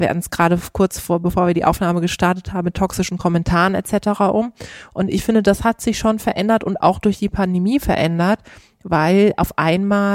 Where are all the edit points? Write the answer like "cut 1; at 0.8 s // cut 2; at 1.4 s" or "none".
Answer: none